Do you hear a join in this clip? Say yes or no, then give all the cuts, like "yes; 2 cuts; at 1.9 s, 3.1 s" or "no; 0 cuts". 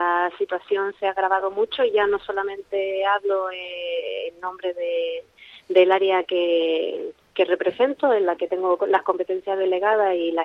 no; 0 cuts